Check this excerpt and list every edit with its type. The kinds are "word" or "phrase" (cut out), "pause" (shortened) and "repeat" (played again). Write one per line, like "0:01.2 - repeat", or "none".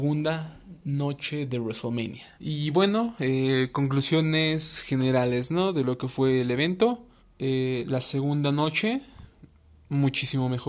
0:02.3 - pause
0:07.2 - pause